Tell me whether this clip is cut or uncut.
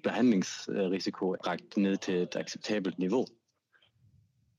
cut